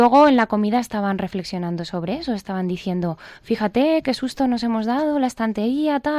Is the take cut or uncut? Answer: uncut